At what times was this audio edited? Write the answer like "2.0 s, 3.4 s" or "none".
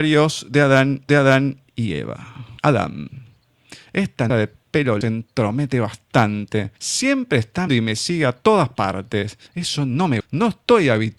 1.1 s, 2.6 s, 4.3 s, 5.0 s, 6.8 s, 7.7 s, 9.5 s, 10.2 s